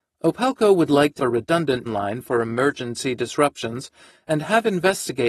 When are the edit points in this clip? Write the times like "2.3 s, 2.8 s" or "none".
1.2 s, 1.9 s